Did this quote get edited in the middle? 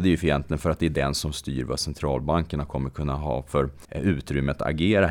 yes; 1 cut; at 3.8 s

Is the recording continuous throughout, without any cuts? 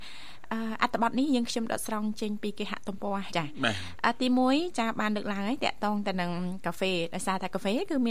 no; 1 cut; at 3.3 s

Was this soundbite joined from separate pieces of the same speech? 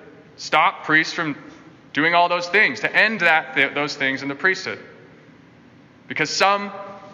no; 0 cuts

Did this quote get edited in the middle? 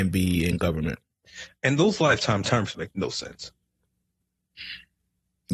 no; 0 cuts

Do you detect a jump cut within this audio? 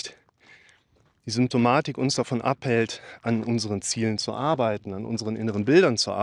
no; 0 cuts

